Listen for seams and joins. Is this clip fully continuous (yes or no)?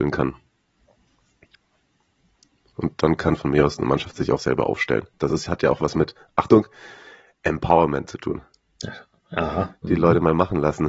yes